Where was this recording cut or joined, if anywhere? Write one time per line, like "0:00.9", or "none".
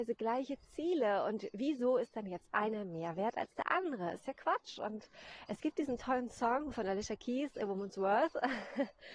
none